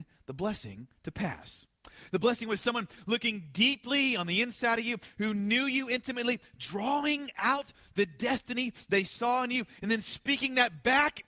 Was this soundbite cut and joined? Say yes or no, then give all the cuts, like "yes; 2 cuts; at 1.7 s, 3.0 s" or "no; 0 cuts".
no; 0 cuts